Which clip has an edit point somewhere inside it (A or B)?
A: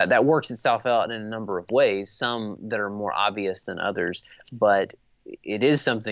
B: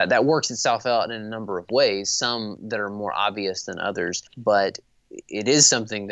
B